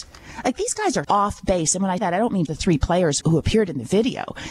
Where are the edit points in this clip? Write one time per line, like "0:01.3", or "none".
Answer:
0:01.0
0:02.0
0:02.5
0:03.2